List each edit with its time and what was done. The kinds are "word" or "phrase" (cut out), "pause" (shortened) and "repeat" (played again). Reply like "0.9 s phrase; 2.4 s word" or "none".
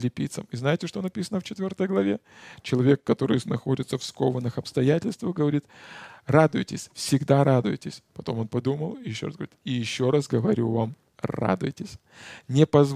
none

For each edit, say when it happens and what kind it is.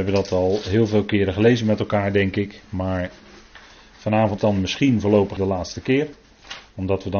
4.4 s word; 5.4 s word

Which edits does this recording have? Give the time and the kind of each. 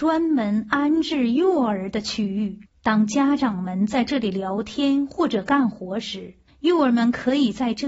2.7 s pause; 6.5 s pause

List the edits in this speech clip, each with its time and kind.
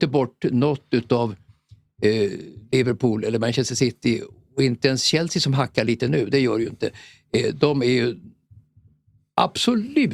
none

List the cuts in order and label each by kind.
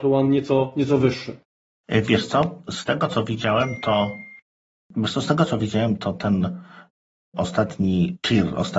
none

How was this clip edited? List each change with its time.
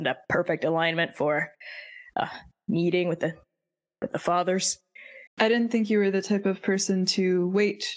5.3 s pause

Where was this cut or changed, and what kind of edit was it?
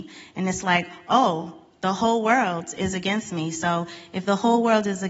none

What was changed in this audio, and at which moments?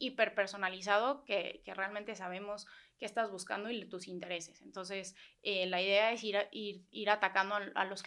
none

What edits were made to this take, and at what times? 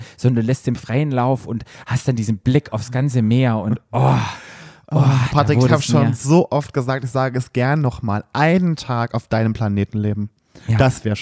none

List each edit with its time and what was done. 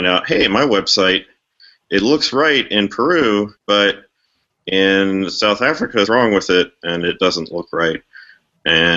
3.6 s pause; 6.1 s word

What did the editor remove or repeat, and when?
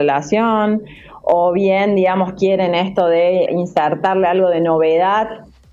3.5 s word

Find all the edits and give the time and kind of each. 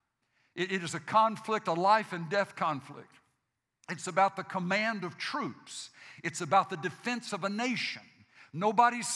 none

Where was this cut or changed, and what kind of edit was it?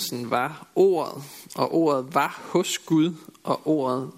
none

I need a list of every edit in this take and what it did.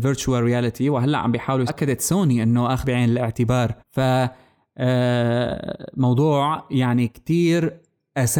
1.7 s word; 2.8 s word; 3.8 s pause

